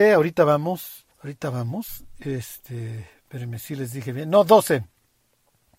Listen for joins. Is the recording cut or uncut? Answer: cut